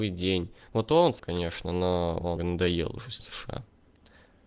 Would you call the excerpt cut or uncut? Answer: cut